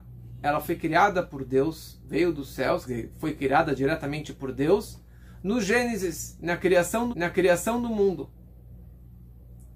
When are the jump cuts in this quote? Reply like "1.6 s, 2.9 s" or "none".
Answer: 2.8 s, 7.1 s

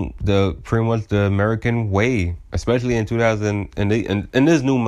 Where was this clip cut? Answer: none

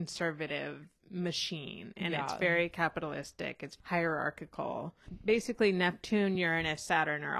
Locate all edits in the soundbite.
none

